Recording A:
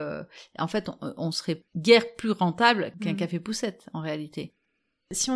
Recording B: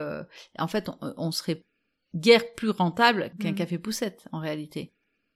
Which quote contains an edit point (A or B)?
A